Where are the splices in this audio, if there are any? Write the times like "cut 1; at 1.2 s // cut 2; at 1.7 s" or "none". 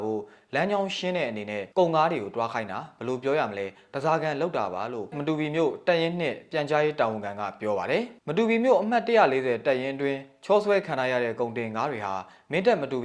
cut 1; at 1.7 s // cut 2; at 5.1 s